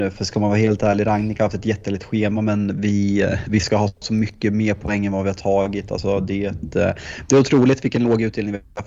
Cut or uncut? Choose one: uncut